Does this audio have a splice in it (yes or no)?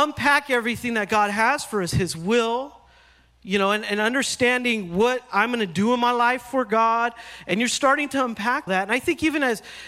yes